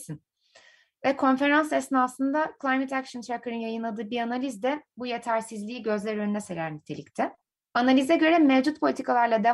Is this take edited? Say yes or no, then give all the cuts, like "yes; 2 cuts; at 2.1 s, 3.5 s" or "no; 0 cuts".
yes; 1 cut; at 7.5 s